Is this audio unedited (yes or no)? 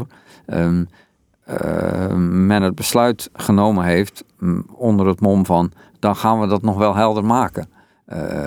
yes